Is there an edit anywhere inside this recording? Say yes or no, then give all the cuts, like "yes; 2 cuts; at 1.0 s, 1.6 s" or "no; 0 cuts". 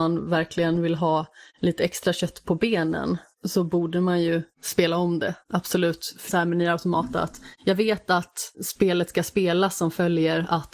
yes; 7 cuts; at 1.5 s, 3.3 s, 4.5 s, 5.4 s, 6.3 s, 7.6 s, 8.5 s